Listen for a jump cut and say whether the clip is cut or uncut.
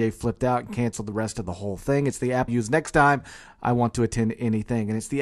cut